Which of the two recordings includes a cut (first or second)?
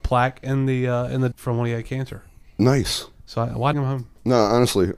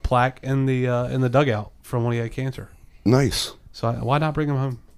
first